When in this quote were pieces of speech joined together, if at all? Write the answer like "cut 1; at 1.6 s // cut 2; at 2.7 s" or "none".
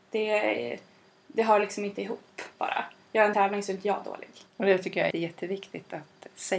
cut 1; at 2.5 s // cut 2; at 3.3 s // cut 3; at 4.5 s // cut 4; at 5.1 s